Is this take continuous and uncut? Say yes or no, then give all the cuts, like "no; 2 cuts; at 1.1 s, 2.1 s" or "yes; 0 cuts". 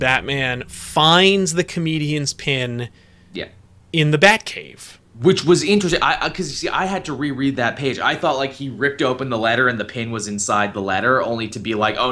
yes; 0 cuts